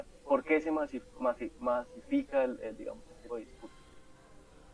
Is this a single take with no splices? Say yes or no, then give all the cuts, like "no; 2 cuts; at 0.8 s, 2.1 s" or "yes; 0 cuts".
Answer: no; 1 cut; at 3.3 s